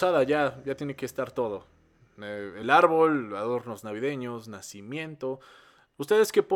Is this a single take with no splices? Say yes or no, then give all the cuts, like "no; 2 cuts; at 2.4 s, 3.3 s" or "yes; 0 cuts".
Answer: yes; 0 cuts